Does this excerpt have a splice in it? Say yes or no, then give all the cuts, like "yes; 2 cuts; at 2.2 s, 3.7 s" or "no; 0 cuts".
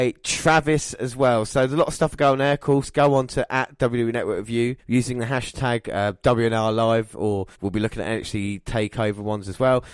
yes; 2 cuts; at 4.8 s, 7.5 s